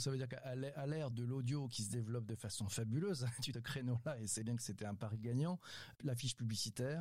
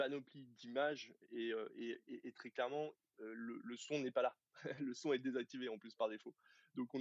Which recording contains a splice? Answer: first; 3 cuts; at 1.1 s, 3.5 s, 4.4 s

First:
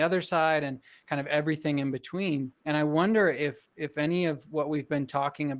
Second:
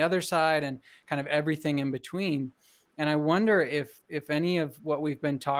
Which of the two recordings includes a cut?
first; 1 cut; at 2.6 s

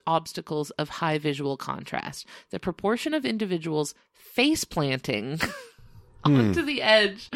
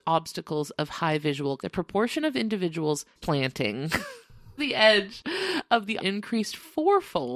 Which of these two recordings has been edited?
second; 4 cuts; at 1.6 s, 3.2 s, 4.6 s, 6.0 s

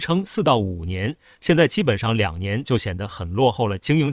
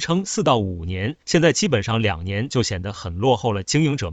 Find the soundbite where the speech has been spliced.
second; 1 cut; at 1.2 s

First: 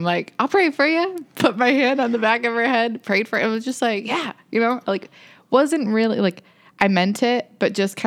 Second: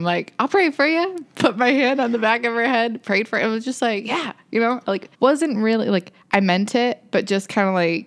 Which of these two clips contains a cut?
second; 2 cuts; at 5.1 s, 6.2 s

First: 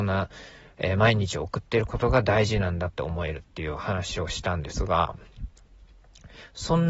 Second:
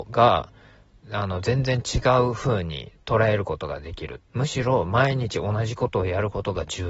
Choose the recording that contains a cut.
second; 1 cut; at 4.3 s

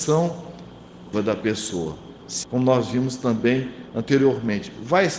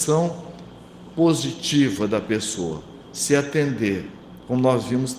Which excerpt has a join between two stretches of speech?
first; 2 cuts; at 1.1 s, 2.4 s

